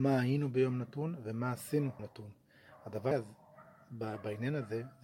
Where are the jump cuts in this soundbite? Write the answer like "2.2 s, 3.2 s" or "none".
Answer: 2.0 s, 3.1 s